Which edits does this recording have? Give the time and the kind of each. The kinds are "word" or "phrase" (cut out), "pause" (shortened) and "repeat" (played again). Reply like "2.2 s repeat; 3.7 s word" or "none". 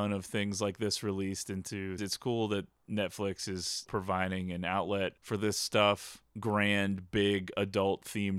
2.0 s word; 3.9 s word; 5.2 s pause; 6.3 s pause